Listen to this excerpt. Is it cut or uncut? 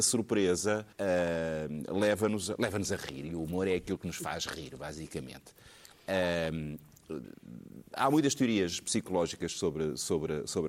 cut